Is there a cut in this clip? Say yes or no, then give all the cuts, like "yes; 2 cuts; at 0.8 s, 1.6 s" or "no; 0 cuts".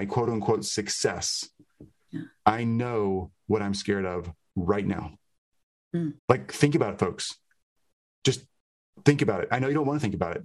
yes; 1 cut; at 6.2 s